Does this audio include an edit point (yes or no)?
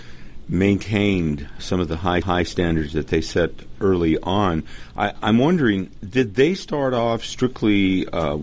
yes